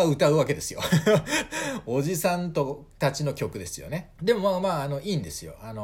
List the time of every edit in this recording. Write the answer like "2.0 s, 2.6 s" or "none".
4.1 s